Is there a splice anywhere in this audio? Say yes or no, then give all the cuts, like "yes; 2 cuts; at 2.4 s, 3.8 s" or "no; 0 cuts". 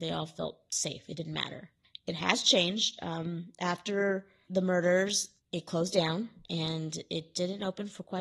yes; 2 cuts; at 4.5 s, 6.4 s